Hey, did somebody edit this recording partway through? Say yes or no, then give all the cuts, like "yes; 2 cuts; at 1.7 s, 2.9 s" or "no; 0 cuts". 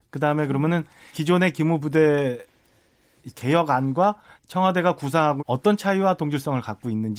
yes; 4 cuts; at 1.1 s, 3.3 s, 4.4 s, 5.4 s